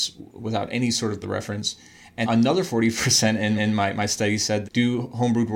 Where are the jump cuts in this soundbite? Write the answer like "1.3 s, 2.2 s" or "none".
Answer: 1.2 s, 2.2 s, 3.6 s, 4.6 s